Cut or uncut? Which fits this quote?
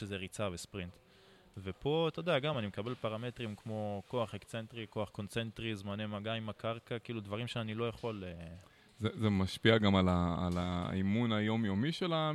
uncut